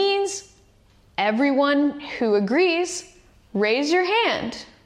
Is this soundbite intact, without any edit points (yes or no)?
yes